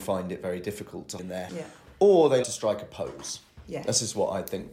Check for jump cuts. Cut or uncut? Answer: cut